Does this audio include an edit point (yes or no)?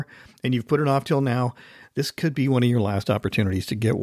no